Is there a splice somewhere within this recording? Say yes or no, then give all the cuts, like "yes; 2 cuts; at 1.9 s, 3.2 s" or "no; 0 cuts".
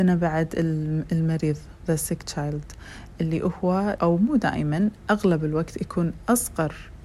yes; 1 cut; at 4.0 s